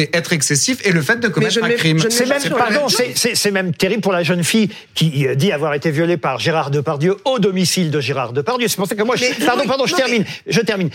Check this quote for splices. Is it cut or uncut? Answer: uncut